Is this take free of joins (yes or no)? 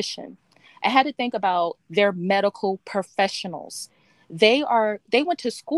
yes